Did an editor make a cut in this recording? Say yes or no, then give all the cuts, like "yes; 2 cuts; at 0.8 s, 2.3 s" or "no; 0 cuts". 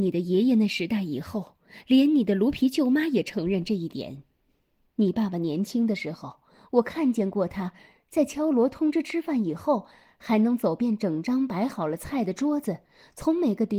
no; 0 cuts